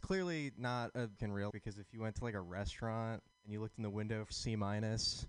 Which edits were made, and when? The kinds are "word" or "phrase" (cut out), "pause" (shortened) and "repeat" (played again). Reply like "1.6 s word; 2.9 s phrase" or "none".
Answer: 1.2 s phrase; 1.5 s word; 3.3 s pause; 4.3 s phrase